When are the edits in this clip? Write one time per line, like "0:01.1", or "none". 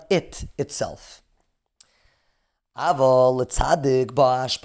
none